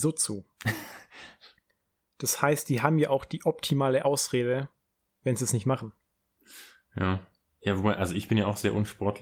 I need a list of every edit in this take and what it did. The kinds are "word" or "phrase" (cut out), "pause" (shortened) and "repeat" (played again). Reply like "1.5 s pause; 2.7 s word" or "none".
none